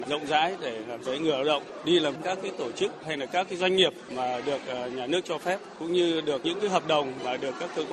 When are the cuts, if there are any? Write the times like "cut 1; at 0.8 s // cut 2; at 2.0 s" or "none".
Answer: cut 1; at 1.0 s // cut 2; at 2.1 s